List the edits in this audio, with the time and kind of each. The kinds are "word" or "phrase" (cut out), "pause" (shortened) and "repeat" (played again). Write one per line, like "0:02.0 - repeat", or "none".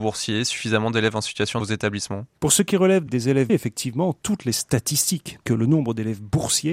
0:01.6 - phrase
0:02.3 - pause
0:03.1 - word
0:03.5 - word
0:05.4 - word